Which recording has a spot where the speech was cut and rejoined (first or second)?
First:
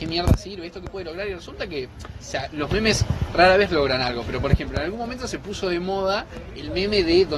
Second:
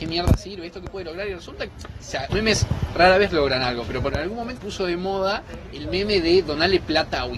second